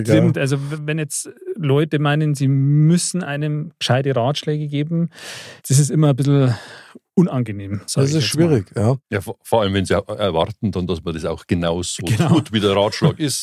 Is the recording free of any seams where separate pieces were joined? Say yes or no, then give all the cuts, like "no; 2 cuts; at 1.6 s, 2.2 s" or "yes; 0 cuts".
no; 3 cuts; at 5.6 s, 7.1 s, 9.0 s